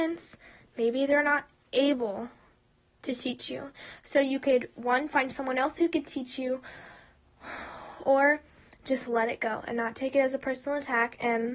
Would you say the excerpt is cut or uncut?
uncut